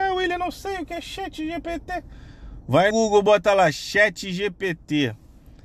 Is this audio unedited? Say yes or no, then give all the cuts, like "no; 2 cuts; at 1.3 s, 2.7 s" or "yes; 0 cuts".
no; 1 cut; at 2.9 s